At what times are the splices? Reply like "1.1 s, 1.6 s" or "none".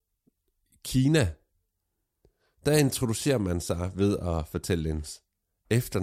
none